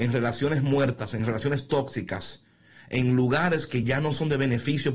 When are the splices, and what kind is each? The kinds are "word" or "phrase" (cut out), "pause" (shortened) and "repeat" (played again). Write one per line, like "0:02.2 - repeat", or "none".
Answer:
none

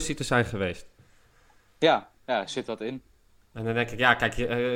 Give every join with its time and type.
none

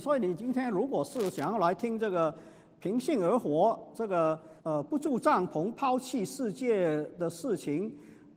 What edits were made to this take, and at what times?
0:04.6 - pause

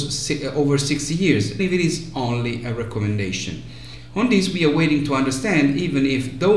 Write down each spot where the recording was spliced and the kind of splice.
0:01.6 - word

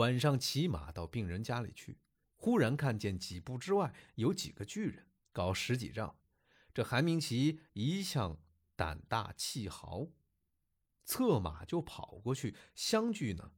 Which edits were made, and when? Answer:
0:05.2 - pause

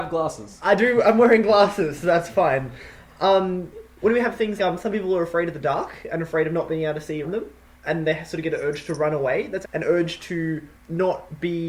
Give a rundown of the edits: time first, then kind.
0:04.6 - word
0:07.2 - word
0:07.8 - word
0:09.6 - word

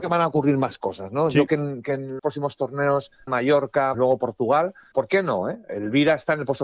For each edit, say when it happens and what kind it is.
0:01.5 - word
0:02.2 - word
0:03.3 - word
0:03.9 - word
0:04.9 - word

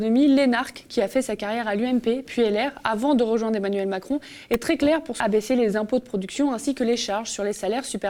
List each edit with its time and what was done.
0:05.2 - phrase

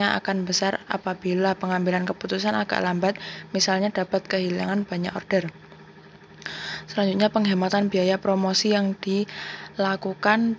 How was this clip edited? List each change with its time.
none

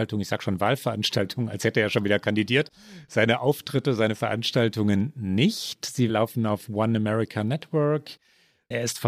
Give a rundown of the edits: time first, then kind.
none

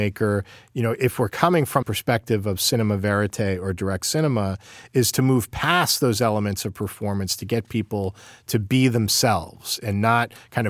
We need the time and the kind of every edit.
0:01.8 - word

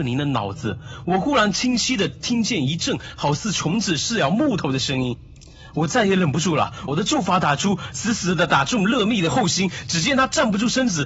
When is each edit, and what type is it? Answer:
0:06.9 - phrase

